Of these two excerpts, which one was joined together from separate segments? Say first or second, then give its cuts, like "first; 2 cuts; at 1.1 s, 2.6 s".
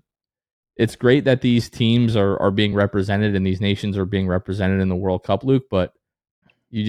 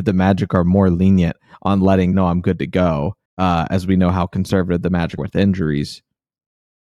second; 3 cuts; at 2.1 s, 3.3 s, 5.2 s